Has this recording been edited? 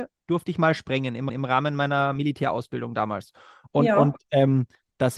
yes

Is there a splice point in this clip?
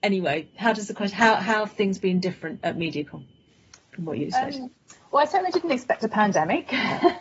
no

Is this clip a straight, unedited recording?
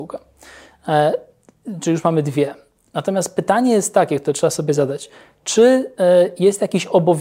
yes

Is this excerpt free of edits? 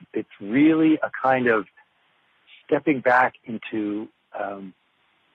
yes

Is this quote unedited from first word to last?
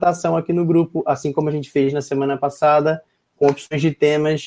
yes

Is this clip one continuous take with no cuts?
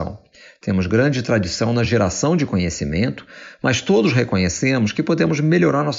yes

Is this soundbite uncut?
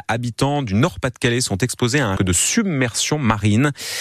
no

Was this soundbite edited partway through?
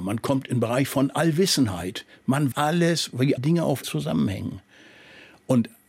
yes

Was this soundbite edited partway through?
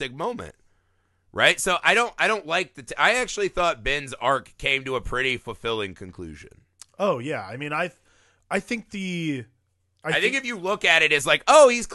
no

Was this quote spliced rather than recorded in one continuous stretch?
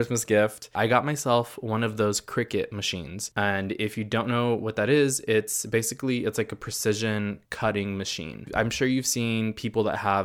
yes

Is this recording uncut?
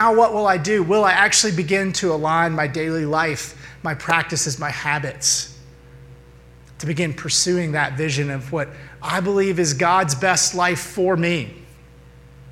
yes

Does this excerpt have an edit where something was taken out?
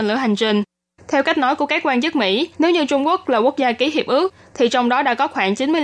yes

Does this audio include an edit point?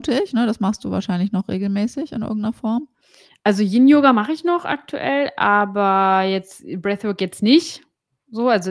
yes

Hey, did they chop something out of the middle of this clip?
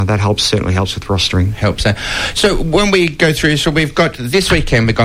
no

